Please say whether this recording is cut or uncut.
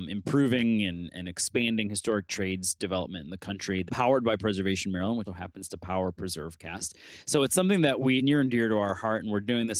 cut